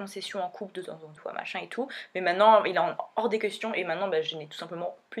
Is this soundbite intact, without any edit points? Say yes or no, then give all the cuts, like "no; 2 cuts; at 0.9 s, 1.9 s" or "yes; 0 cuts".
no; 1 cut; at 1.2 s